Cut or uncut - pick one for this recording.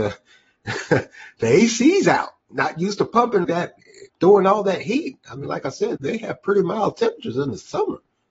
cut